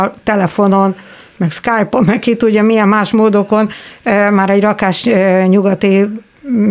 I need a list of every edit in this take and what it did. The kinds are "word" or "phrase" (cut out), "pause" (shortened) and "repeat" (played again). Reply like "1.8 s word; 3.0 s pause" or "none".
none